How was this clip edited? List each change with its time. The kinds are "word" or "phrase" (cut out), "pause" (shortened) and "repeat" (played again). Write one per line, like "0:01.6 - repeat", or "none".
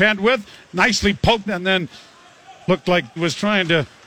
0:01.5 - word
0:02.6 - pause
0:03.2 - word